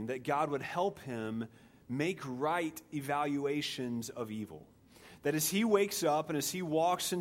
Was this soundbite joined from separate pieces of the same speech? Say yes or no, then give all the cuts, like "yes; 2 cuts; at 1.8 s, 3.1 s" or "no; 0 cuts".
no; 0 cuts